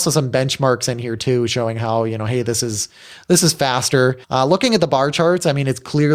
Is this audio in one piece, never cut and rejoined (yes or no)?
no